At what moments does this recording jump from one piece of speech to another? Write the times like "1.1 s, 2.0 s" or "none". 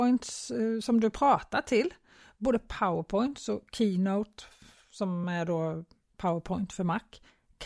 none